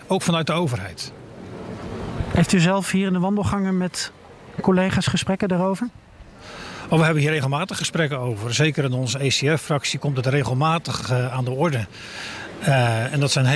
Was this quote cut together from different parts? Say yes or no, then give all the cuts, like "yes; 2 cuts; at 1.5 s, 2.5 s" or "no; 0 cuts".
no; 0 cuts